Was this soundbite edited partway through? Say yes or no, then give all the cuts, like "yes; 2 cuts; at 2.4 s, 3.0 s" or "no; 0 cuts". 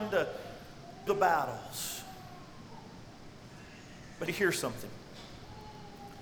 yes; 2 cuts; at 1.1 s, 4.3 s